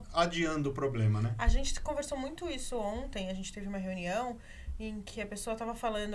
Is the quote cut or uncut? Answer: uncut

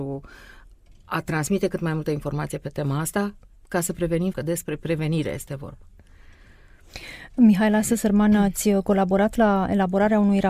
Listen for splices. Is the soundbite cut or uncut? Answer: cut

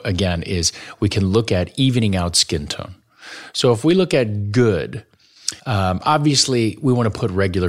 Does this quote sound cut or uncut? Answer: cut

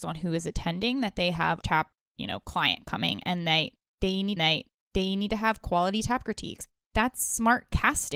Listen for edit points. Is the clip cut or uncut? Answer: cut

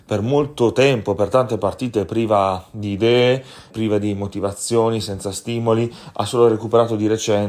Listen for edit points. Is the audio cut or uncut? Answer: cut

